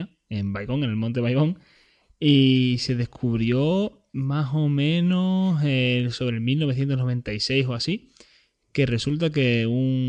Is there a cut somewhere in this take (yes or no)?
no